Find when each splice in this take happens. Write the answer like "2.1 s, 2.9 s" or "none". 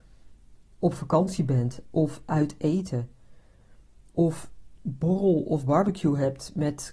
4.8 s